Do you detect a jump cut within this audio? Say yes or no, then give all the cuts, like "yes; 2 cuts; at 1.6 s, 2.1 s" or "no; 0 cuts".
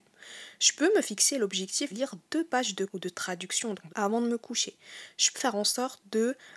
yes; 4 cuts; at 1.9 s, 2.9 s, 3.9 s, 5.3 s